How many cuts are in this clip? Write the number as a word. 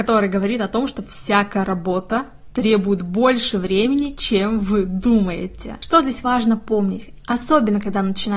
zero